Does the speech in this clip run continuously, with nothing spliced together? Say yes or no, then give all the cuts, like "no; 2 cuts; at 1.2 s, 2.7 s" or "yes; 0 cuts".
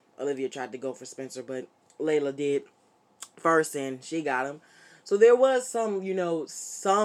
yes; 0 cuts